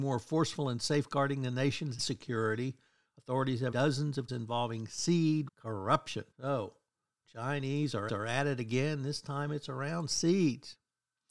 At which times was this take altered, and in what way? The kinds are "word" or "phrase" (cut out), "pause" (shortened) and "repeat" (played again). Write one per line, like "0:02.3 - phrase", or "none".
0:02.0 - word
0:03.7 - word
0:04.3 - word
0:05.5 - word
0:06.3 - pause
0:08.1 - repeat